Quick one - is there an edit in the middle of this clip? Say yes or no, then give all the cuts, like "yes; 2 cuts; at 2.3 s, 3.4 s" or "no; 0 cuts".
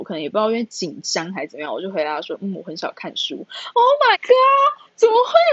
yes; 1 cut; at 4.1 s